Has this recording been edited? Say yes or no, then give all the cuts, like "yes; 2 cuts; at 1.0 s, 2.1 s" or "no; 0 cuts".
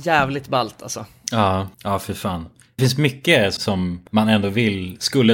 yes; 4 cuts; at 1.7 s, 2.8 s, 3.6 s, 4.1 s